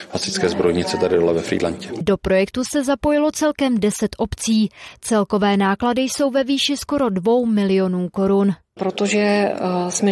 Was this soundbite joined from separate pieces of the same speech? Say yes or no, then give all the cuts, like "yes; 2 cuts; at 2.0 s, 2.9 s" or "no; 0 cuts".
no; 0 cuts